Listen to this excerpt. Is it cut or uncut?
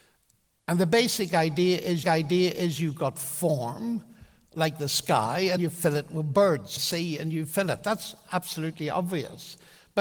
cut